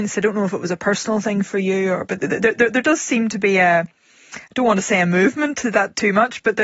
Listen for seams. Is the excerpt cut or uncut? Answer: uncut